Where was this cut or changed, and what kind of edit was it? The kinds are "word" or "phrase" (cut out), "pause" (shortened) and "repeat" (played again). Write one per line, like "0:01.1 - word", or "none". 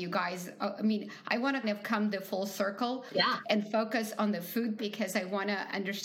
0:01.6 - word
0:04.8 - word